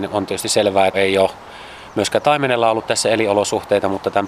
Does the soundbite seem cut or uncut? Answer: cut